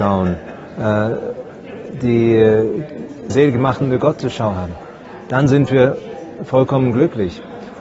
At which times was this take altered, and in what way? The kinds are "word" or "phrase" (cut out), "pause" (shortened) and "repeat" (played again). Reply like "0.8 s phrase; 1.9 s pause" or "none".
3.3 s phrase